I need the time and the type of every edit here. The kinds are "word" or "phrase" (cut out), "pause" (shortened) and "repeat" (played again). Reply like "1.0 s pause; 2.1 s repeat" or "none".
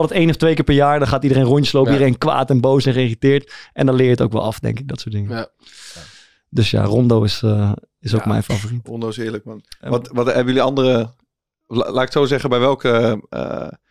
none

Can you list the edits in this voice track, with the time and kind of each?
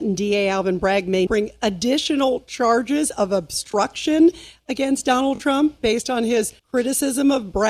1.3 s word; 6.6 s pause

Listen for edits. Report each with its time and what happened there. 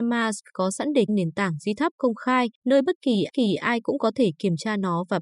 1.1 s phrase; 2.5 s pause; 3.3 s repeat

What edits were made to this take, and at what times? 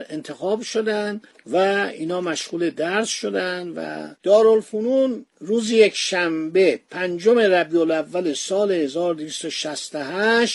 none

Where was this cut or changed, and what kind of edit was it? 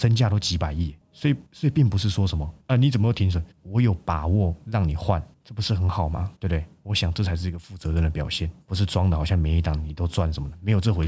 1.5 s pause; 2.6 s pause; 3.5 s pause; 5.3 s phrase; 6.4 s pause; 8.6 s pause

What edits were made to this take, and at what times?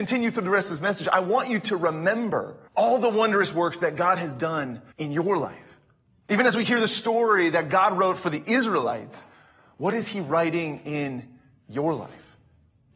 2.7 s pause; 4.9 s pause

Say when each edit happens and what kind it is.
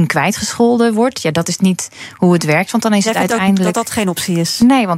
none

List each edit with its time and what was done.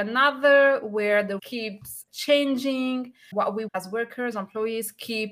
1.4 s word; 2.1 s word; 3.7 s word; 4.3 s word

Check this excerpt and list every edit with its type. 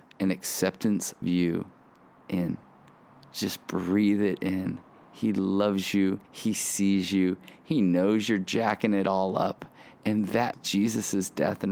1.2 s word; 6.2 s pause; 10.5 s word

